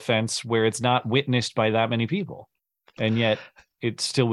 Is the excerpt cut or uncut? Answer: uncut